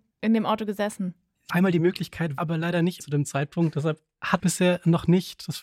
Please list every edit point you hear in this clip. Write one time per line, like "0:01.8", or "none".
0:01.5
0:02.4
0:03.0
0:04.4